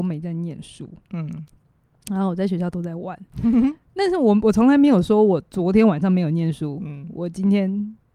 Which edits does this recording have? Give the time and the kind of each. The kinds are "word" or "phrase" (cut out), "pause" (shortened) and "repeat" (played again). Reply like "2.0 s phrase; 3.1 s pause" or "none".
none